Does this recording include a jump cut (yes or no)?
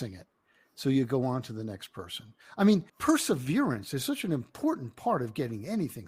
yes